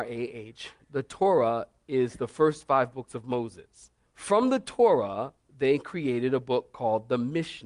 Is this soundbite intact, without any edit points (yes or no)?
no